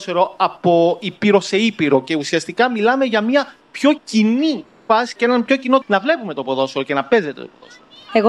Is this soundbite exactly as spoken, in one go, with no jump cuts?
no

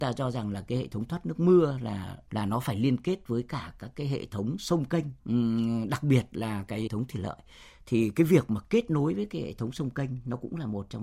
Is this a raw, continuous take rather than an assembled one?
no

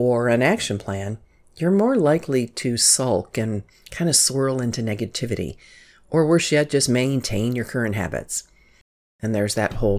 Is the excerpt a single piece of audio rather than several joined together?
yes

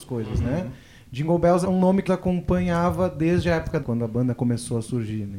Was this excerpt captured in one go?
no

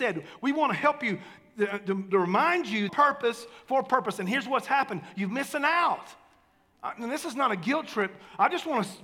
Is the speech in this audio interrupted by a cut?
yes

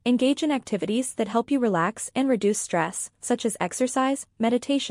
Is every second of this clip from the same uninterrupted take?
yes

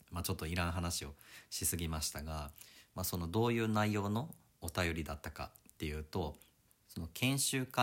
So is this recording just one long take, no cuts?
yes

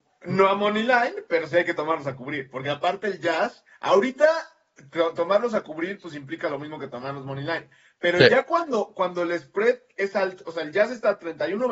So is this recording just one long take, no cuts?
yes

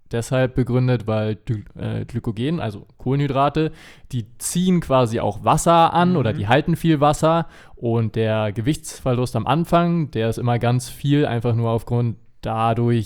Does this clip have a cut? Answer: no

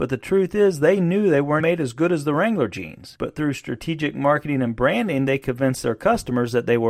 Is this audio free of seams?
no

